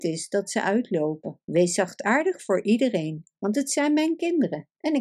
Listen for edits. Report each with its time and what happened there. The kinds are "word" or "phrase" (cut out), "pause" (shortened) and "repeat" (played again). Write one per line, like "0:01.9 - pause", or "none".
0:01.4 - pause